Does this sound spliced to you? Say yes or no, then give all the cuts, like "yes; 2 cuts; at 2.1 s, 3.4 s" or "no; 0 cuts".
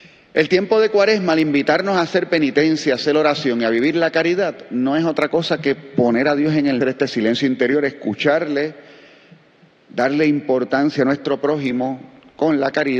yes; 1 cut; at 6.8 s